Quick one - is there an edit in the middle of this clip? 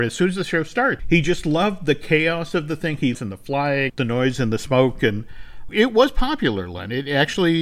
yes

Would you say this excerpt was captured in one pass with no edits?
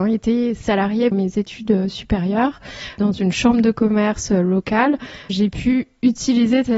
no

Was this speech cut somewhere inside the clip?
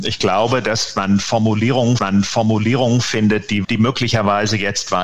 yes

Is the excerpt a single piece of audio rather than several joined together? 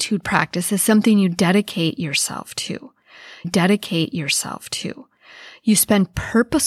no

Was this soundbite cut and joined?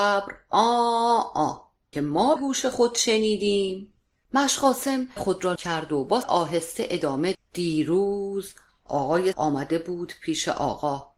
yes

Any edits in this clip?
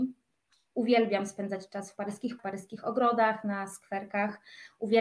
yes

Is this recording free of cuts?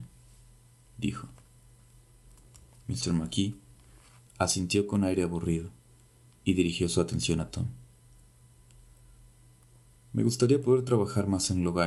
yes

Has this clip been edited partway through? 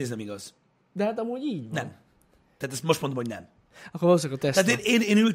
no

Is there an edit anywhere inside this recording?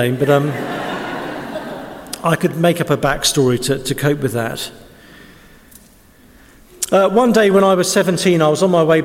no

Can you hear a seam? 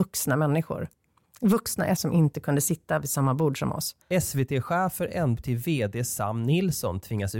yes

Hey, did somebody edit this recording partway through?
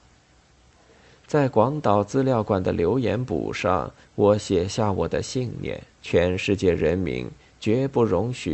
yes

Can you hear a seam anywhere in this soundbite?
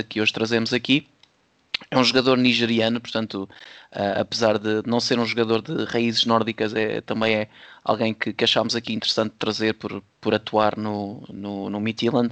yes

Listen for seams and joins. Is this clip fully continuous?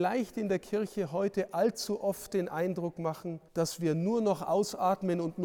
no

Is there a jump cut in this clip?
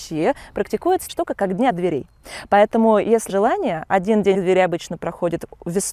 yes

